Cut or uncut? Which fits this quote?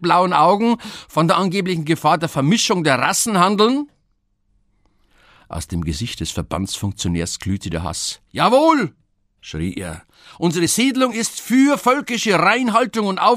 uncut